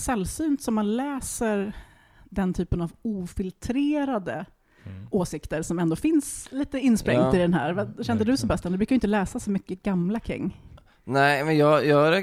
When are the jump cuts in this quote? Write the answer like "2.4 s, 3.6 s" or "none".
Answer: none